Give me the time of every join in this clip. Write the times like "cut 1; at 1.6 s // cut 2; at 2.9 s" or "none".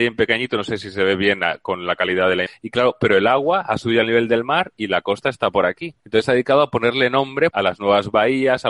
cut 1; at 2.5 s // cut 2; at 6.0 s // cut 3; at 7.5 s

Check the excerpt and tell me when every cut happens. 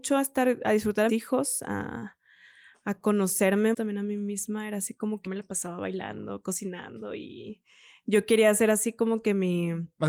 cut 1; at 1.1 s // cut 2; at 3.7 s // cut 3; at 5.3 s

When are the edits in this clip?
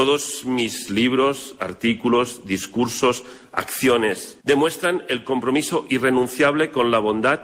cut 1; at 4.4 s

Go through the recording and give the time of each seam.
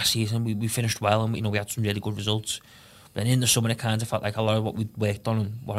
none

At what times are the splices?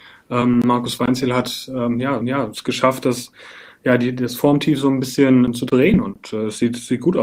cut 1; at 2.2 s // cut 2; at 5.5 s

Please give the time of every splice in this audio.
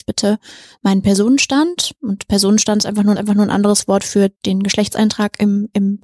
cut 1; at 3.2 s // cut 2; at 4.4 s

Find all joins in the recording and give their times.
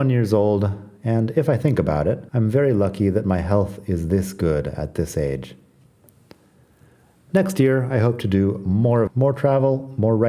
cut 1; at 2.3 s // cut 2; at 9.1 s

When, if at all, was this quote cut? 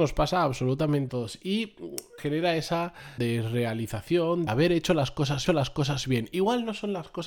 cut 1; at 1.1 s // cut 2; at 2.2 s // cut 3; at 3.2 s // cut 4; at 4.5 s // cut 5; at 5.5 s

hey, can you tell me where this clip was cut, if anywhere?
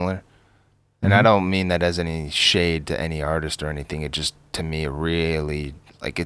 none

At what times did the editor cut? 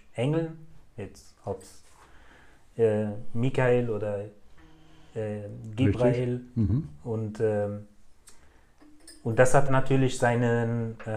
cut 1; at 9.7 s

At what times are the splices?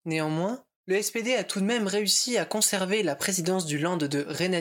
none

